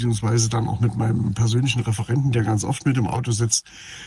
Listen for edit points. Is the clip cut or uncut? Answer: uncut